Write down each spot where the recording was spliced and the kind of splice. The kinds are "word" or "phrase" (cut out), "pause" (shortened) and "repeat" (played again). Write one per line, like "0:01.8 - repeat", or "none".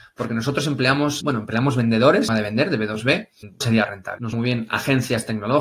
0:01.2 - word
0:02.3 - phrase
0:03.6 - phrase
0:04.3 - word